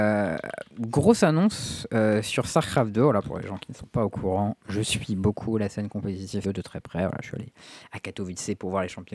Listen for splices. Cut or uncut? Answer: cut